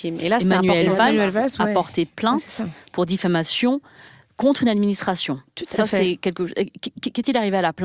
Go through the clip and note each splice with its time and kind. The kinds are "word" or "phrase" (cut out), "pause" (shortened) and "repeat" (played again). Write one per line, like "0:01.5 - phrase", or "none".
none